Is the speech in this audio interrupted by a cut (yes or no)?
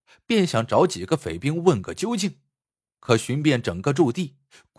no